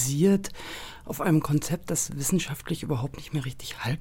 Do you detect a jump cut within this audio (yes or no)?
no